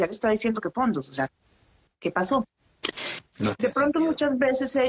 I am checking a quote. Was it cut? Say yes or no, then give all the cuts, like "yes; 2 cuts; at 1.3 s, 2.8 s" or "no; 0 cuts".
no; 0 cuts